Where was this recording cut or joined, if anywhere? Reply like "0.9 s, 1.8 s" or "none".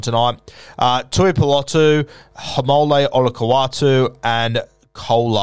none

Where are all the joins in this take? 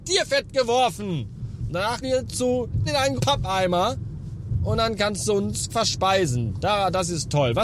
2.0 s, 2.9 s, 3.2 s, 5.7 s

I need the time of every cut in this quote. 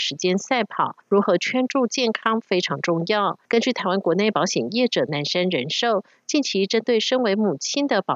1.0 s, 3.5 s

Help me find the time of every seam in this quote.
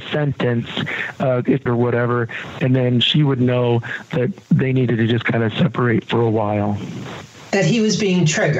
1.7 s

